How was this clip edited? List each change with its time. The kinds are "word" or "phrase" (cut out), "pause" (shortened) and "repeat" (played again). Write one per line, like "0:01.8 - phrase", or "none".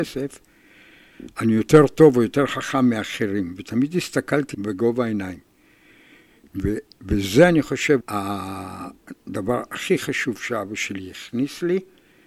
0:04.5 - word
0:08.0 - word